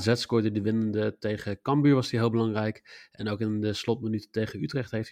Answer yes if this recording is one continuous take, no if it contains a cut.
yes